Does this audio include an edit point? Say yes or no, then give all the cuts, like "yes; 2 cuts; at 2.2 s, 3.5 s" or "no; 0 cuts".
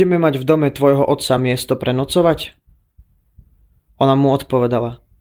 no; 0 cuts